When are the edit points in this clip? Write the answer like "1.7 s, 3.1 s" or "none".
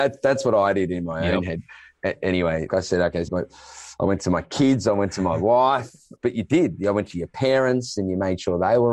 2.7 s, 3.3 s, 6.2 s